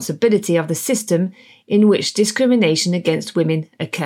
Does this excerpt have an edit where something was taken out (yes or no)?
no